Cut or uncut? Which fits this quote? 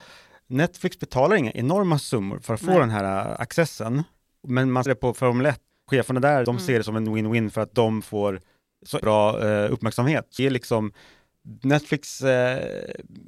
cut